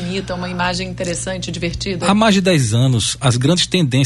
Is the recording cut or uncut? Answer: uncut